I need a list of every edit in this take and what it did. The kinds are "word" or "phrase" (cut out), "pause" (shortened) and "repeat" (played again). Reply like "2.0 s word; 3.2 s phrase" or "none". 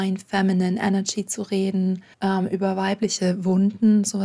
2.1 s pause